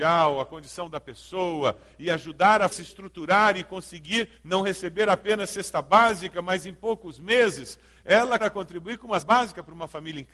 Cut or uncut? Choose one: cut